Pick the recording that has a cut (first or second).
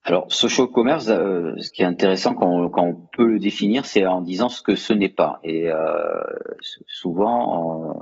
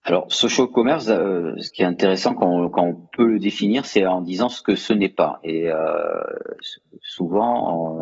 first